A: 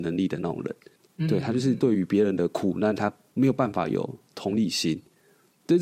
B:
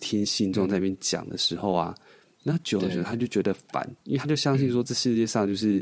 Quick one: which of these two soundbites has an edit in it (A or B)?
B